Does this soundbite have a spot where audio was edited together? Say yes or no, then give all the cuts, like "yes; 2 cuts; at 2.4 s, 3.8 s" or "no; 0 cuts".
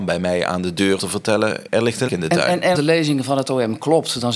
yes; 4 cuts; at 1.0 s, 1.7 s, 2.1 s, 2.7 s